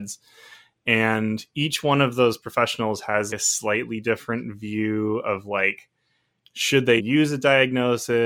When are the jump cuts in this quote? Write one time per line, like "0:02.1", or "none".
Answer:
0:03.3
0:07.0